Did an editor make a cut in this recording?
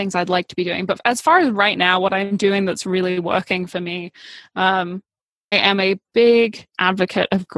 yes; 1 cut; at 5.5 s

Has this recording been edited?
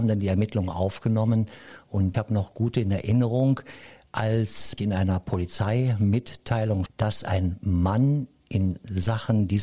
yes; 3 cuts; at 2.1 s, 4.8 s, 6.9 s

